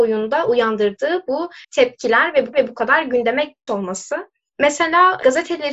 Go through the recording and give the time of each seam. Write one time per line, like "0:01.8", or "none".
0:01.6
0:02.5
0:03.7